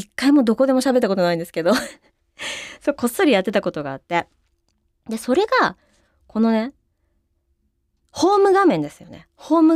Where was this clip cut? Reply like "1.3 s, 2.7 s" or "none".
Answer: none

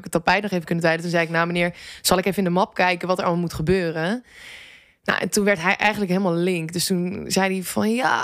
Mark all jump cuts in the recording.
none

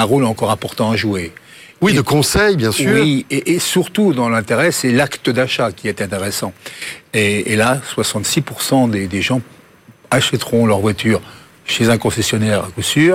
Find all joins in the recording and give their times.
none

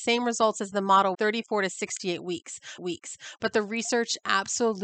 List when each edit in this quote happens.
1.1 s, 2.8 s

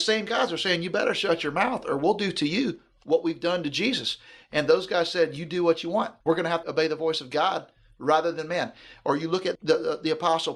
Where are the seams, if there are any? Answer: 6.2 s, 6.6 s, 9.5 s

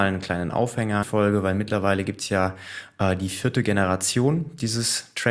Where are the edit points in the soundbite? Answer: 1.0 s

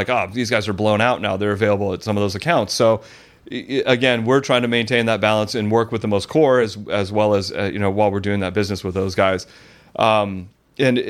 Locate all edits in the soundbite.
none

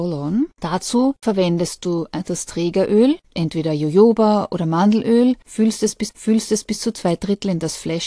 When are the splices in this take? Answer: 6.1 s

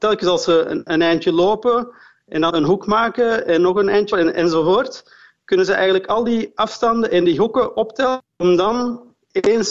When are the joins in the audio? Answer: 2.5 s, 4.1 s

